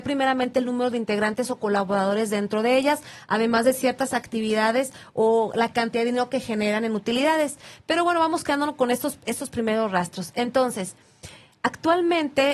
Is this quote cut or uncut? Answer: uncut